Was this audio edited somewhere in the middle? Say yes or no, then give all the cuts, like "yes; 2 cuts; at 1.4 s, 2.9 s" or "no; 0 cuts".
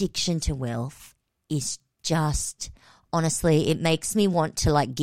no; 0 cuts